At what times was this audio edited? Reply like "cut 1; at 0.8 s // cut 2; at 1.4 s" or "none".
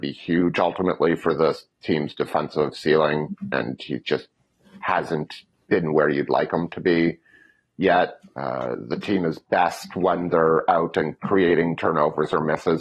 none